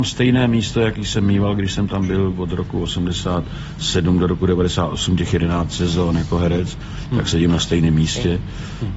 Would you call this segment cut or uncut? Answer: uncut